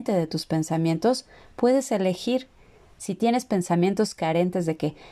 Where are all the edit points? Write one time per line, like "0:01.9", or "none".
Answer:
none